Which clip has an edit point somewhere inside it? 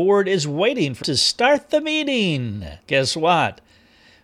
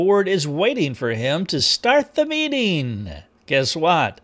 first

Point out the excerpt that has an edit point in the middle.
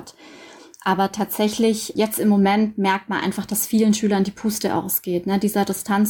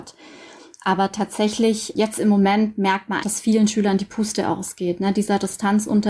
second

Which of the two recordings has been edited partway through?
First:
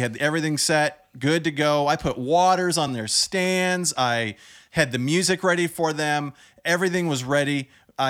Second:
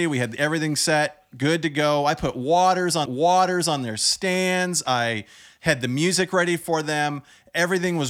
second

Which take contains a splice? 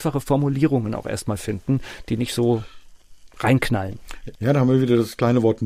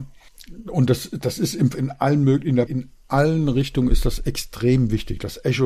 second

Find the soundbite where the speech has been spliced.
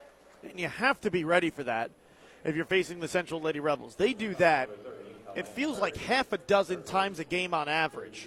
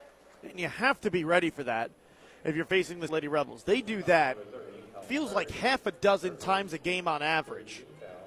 second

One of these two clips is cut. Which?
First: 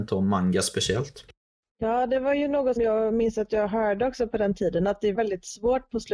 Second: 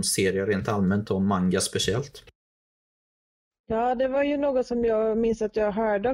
first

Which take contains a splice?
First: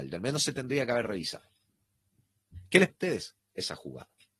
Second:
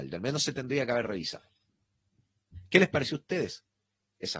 first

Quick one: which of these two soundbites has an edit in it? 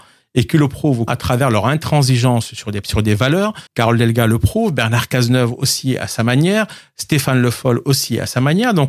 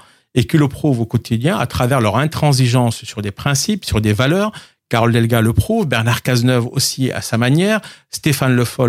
first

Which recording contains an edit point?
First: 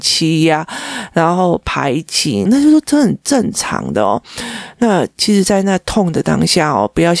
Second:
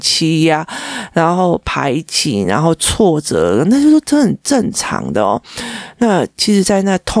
first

